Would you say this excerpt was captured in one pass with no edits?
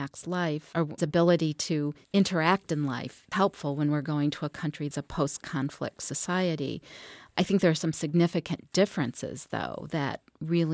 no; 4 cuts; at 1.0 s, 2.0 s, 3.3 s, 4.9 s

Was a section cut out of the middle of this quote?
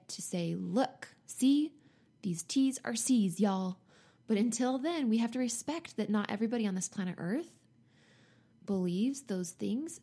no; 0 cuts

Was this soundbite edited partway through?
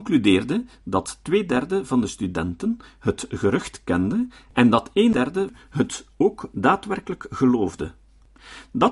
no; 0 cuts

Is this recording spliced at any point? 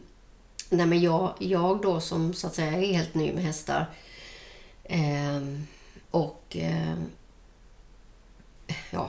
yes; 1 cut; at 6.0 s

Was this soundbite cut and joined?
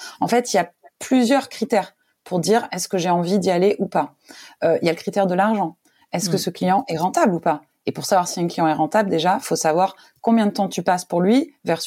no; 0 cuts

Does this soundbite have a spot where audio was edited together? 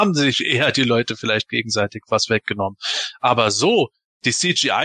no; 0 cuts

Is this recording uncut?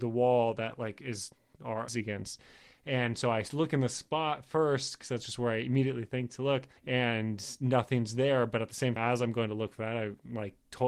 no; 3 cuts; at 1.9 s, 6.8 s, 9.0 s

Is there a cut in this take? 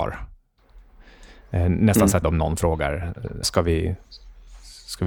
yes; 2 cuts; at 2.2 s, 3.4 s

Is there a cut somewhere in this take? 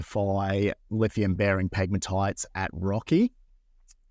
no; 0 cuts

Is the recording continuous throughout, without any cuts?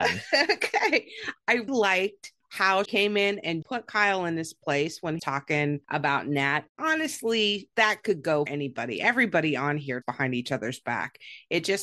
no; 7 cuts; at 1.7 s, 2.8 s, 3.6 s, 5.2 s, 6.8 s, 8.5 s, 10.0 s

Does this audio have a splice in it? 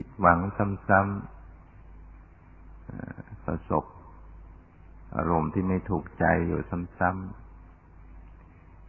yes; 1 cut; at 1.7 s

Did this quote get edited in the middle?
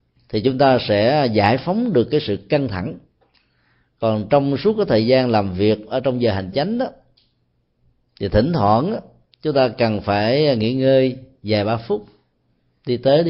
no; 0 cuts

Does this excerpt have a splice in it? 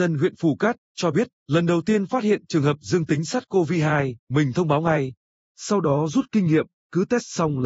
yes; 1 cut; at 4.2 s

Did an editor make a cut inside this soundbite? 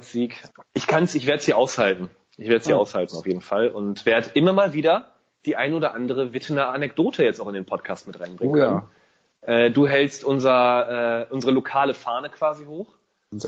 no; 0 cuts

